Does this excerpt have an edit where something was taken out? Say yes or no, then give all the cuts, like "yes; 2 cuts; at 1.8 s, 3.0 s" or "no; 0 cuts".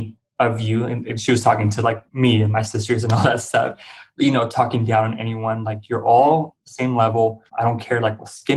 yes; 2 cuts; at 2.1 s, 7.5 s